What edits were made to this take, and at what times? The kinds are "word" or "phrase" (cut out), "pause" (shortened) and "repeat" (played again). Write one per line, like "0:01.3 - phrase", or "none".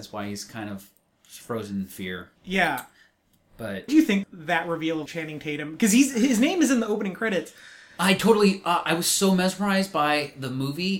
0:02.4 - pause
0:03.9 - word
0:04.2 - word
0:05.1 - word